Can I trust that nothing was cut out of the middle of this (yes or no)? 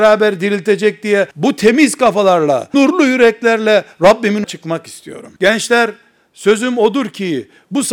no